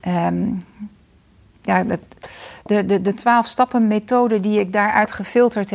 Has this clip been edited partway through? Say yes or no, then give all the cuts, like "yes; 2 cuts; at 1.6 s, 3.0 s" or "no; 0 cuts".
no; 0 cuts